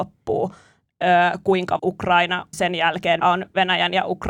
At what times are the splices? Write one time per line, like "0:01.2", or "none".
0:01.8
0:02.5
0:03.2